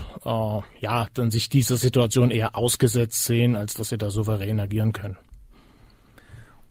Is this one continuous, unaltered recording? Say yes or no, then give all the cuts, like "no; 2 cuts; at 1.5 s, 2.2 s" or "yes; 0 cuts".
yes; 0 cuts